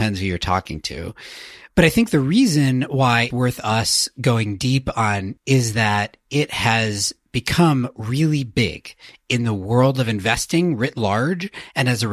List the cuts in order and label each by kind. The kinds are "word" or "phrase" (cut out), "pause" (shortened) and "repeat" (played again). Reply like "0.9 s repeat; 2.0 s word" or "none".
3.3 s word; 5.4 s phrase